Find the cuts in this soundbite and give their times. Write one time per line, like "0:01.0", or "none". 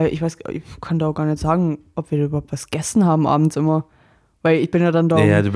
none

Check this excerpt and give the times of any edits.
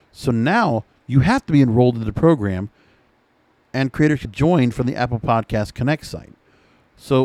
0:04.2

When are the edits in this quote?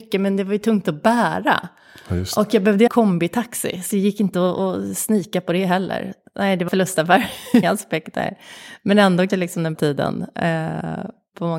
0:02.9
0:03.9
0:06.7
0:07.6
0:09.3
0:09.7

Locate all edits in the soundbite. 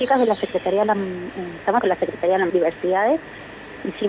0:01.8
0:02.5

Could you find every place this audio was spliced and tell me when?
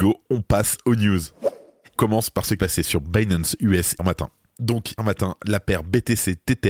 0:02.0
0:02.6
0:04.0
0:05.0

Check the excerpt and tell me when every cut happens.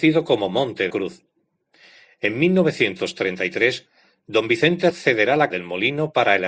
0:00.9
0:04.9
0:05.5

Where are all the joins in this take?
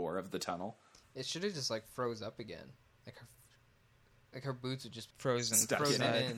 0:05.1

